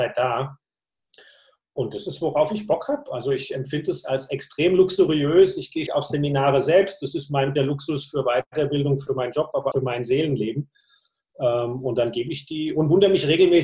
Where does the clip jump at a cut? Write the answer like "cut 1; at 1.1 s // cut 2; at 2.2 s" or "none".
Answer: cut 1; at 5.9 s // cut 2; at 7.6 s // cut 3; at 9.7 s

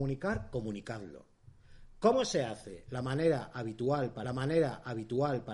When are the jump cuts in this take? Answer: cut 1; at 4.2 s

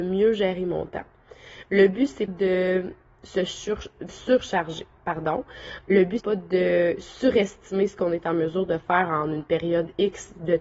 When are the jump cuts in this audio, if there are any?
cut 1; at 2.3 s // cut 2; at 4.1 s // cut 3; at 6.2 s

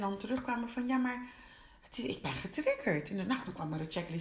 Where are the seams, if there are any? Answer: none

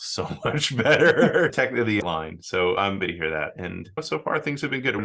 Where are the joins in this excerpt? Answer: cut 1; at 1.5 s // cut 2; at 2.0 s // cut 3; at 3.0 s

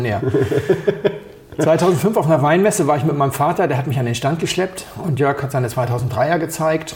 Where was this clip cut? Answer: none

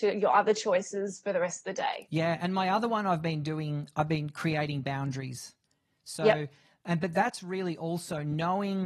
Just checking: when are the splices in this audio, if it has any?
none

